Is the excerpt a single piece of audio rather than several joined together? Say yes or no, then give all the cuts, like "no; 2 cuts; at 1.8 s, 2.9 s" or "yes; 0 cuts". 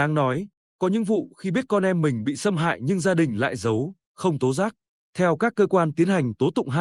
yes; 0 cuts